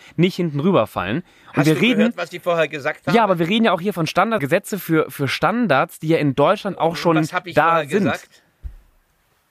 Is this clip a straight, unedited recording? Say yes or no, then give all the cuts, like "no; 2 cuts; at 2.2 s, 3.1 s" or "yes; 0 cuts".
no; 1 cut; at 4.4 s